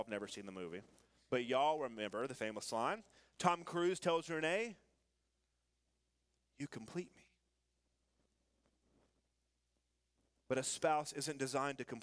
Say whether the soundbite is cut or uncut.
uncut